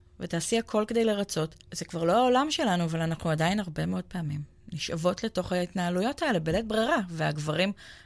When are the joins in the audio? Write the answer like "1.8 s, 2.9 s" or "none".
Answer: 1.6 s